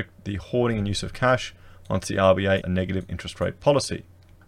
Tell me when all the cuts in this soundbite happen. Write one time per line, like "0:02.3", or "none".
0:02.6